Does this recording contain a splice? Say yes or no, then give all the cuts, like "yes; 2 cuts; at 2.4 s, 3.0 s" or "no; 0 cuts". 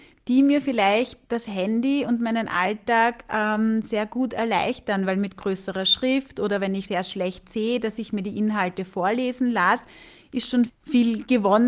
yes; 3 cuts; at 1.2 s, 6.8 s, 10.7 s